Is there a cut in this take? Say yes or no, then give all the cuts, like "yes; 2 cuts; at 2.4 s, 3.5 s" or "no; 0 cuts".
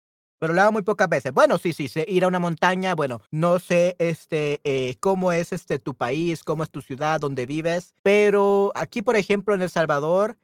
yes; 2 cuts; at 3.3 s, 8.0 s